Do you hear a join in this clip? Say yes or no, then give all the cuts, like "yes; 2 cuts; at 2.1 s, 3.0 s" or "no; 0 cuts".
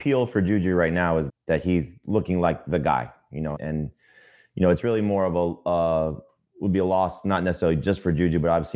yes; 2 cuts; at 1.3 s, 3.6 s